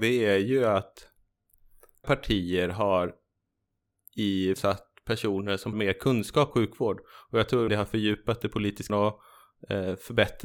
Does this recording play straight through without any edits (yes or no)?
no